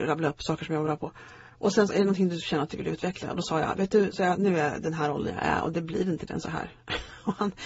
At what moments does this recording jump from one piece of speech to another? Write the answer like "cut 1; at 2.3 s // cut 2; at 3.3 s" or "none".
cut 1; at 1.9 s // cut 2; at 6.3 s